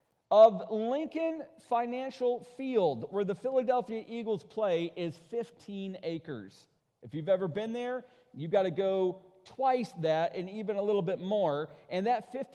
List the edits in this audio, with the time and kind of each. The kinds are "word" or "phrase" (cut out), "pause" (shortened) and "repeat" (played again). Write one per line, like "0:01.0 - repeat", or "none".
0:06.8 - pause